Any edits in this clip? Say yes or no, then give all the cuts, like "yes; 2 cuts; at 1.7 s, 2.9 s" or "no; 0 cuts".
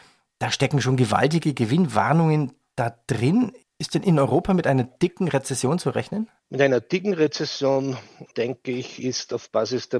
yes; 1 cut; at 6.4 s